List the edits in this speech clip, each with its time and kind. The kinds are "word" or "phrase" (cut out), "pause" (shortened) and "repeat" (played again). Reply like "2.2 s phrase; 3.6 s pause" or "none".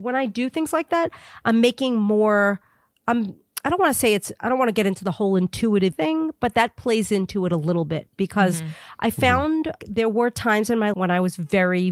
5.9 s word; 9.8 s word; 10.9 s word